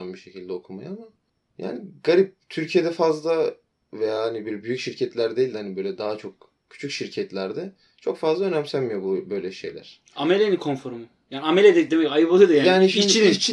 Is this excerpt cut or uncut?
uncut